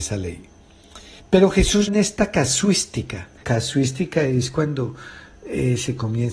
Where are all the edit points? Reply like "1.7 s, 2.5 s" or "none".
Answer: 1.2 s, 1.9 s, 3.4 s